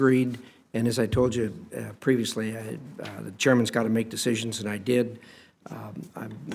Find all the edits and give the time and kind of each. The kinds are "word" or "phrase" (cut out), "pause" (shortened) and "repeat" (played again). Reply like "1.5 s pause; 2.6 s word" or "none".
none